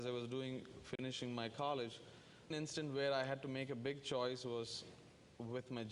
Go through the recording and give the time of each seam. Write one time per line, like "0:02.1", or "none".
0:02.5